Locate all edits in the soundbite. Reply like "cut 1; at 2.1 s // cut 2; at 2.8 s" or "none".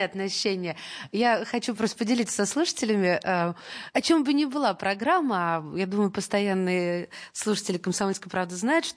none